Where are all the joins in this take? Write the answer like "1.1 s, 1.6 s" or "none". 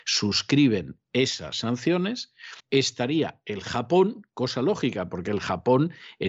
2.6 s